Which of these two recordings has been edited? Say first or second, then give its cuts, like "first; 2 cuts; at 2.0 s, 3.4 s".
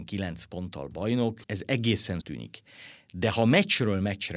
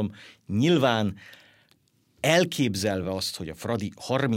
first; 2 cuts; at 1.4 s, 2.2 s